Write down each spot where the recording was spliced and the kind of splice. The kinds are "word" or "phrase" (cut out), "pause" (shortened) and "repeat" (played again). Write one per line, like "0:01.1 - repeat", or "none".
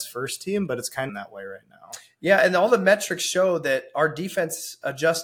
0:01.1 - phrase